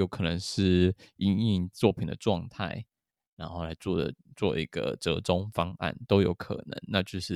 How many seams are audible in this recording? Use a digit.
0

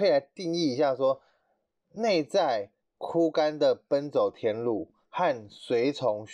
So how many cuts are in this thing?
0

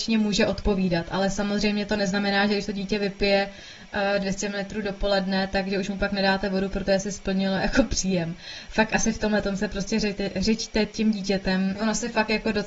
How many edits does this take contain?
0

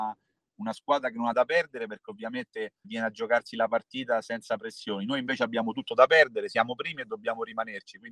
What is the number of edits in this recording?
2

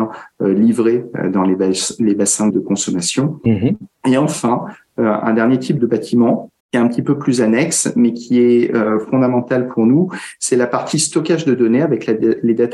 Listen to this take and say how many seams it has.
3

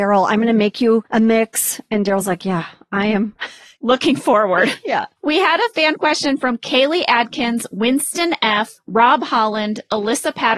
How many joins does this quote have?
0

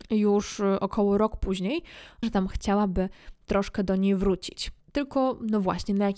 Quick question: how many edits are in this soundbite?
2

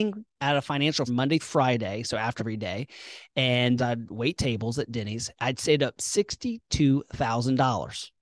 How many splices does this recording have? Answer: 4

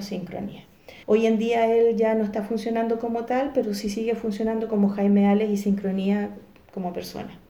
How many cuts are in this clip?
1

